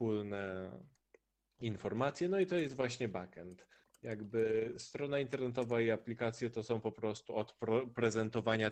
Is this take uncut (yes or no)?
yes